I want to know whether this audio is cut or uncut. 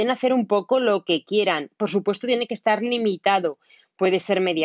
uncut